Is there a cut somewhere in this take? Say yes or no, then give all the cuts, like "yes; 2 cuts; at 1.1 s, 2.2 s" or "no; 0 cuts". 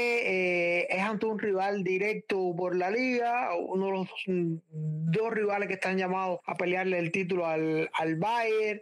no; 0 cuts